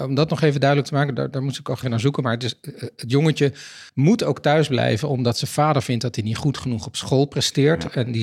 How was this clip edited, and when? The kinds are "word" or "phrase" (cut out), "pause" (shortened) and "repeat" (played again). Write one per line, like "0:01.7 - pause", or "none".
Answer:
0:01.8 - word
0:03.9 - pause